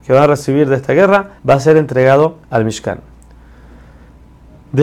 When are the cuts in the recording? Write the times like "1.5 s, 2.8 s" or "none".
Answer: 1.4 s, 2.4 s